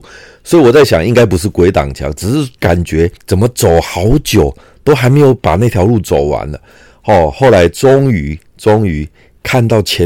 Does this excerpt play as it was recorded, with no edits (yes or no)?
no